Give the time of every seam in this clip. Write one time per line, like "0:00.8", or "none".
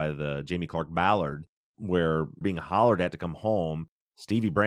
0:02.4

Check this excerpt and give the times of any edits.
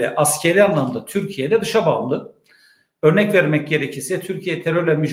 none

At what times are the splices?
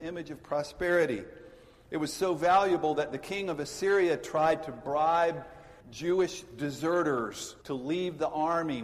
0:05.8
0:07.6

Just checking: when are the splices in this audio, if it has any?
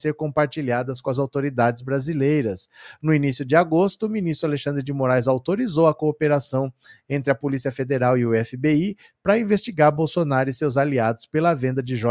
none

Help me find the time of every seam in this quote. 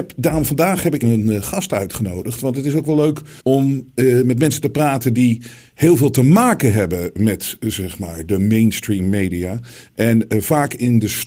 0:01.0
0:03.4

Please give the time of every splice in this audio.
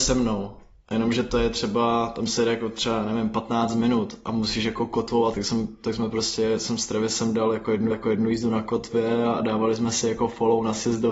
0:05.3
0:07.9

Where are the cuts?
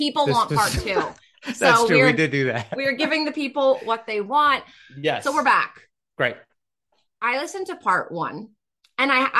none

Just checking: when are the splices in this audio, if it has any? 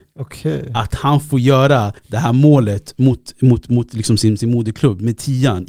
0:02.0

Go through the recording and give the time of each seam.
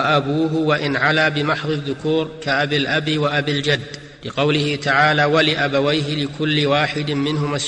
0:04.1

